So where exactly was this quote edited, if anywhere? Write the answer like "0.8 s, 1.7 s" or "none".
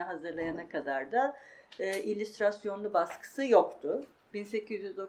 none